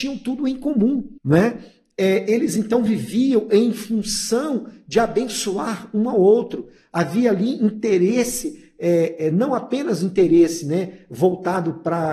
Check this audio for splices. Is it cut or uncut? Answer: cut